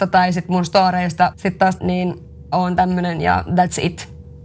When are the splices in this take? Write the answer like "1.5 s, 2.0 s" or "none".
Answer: 1.3 s, 1.8 s, 2.5 s